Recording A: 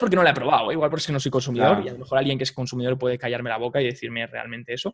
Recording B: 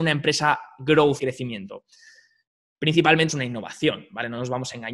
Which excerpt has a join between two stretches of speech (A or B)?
B